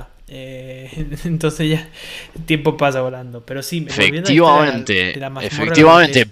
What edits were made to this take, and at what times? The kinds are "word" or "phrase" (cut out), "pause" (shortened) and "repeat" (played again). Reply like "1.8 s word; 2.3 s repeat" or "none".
3.9 s word